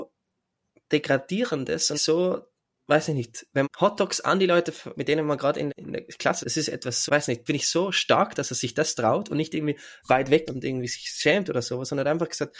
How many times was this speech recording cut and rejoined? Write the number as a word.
eight